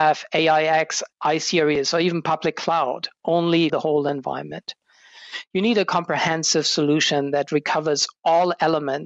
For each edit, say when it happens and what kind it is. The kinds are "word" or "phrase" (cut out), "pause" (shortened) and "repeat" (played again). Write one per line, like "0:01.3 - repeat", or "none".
0:01.1 - pause
0:03.7 - phrase